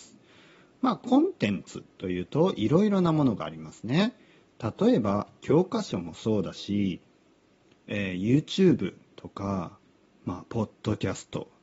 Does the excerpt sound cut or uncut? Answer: uncut